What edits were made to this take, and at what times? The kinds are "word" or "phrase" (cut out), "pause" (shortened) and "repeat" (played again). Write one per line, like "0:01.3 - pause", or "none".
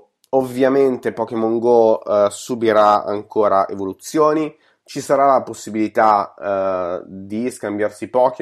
none